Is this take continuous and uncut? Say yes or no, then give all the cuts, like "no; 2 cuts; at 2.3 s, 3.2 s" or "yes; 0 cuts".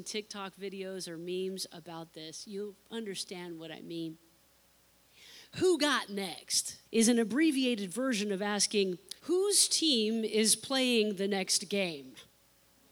no; 3 cuts; at 2.8 s, 6.9 s, 9.2 s